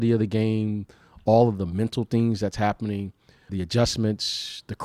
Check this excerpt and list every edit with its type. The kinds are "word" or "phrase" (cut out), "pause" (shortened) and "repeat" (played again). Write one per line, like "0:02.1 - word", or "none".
0:03.5 - word